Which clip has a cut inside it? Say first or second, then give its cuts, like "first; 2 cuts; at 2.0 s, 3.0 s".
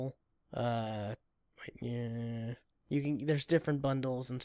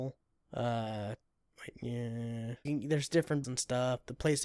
second; 2 cuts; at 2.7 s, 3.4 s